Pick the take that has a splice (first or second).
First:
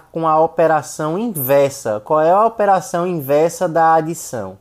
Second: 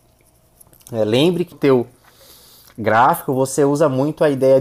second